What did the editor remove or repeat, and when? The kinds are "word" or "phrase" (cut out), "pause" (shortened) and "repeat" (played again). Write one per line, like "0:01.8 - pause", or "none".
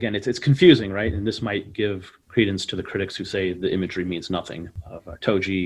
none